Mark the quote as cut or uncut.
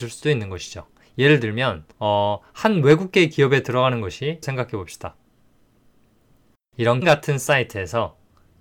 cut